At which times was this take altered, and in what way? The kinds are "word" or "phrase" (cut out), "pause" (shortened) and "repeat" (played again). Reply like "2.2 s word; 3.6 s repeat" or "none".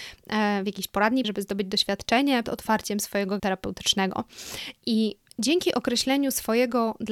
1.2 s word; 2.4 s word; 3.4 s word